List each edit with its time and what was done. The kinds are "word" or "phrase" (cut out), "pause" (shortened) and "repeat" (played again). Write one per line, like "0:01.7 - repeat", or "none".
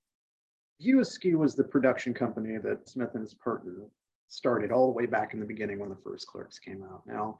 0:02.9 - word